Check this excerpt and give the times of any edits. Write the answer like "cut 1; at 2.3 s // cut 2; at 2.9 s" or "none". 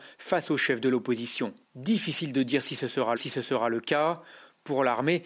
cut 1; at 1.6 s // cut 2; at 3.2 s